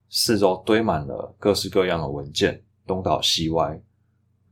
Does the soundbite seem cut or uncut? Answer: uncut